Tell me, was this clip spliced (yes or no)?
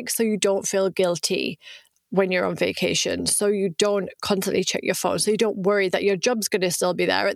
no